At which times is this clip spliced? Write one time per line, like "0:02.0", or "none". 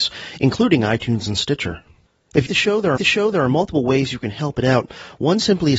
0:02.5
0:03.0